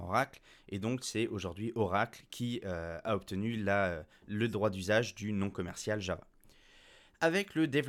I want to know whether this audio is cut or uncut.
uncut